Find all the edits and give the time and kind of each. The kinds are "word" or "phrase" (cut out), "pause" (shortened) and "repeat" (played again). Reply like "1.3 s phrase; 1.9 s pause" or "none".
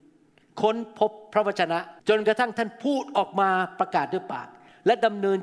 2.0 s pause